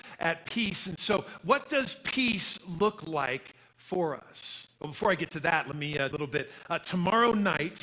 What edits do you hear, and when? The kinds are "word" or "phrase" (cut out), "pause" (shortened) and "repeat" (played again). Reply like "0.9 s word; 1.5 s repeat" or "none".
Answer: 4.7 s pause; 6.1 s phrase